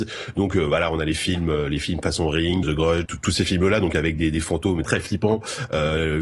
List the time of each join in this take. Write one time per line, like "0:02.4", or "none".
0:02.6
0:03.0
0:04.8